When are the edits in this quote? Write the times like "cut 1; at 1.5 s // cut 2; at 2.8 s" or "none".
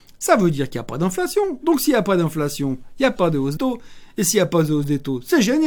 cut 1; at 3.6 s